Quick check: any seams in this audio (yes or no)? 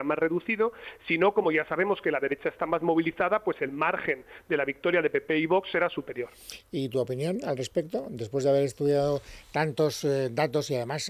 no